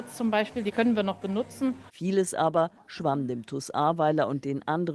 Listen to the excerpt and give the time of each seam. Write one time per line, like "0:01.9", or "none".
none